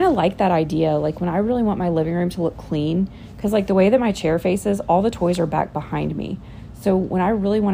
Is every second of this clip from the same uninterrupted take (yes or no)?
yes